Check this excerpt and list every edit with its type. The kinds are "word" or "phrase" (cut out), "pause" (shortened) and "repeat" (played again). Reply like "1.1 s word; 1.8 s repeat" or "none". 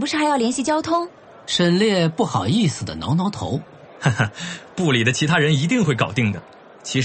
none